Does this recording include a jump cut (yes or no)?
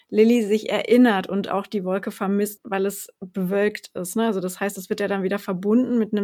yes